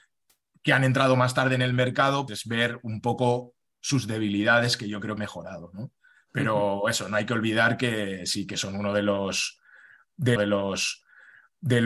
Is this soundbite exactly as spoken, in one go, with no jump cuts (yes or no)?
no